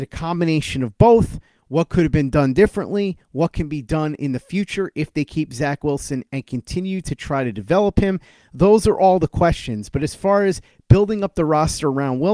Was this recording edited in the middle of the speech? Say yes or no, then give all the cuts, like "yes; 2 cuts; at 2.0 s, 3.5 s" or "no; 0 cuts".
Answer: no; 0 cuts